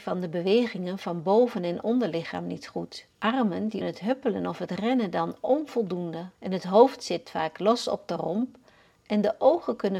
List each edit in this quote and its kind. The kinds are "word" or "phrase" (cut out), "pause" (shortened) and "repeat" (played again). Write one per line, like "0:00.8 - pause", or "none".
0:03.1 - pause
0:03.8 - word
0:06.3 - pause